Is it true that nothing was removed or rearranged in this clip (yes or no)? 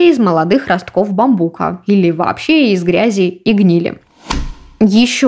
yes